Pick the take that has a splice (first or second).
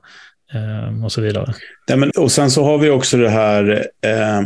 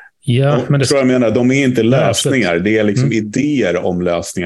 first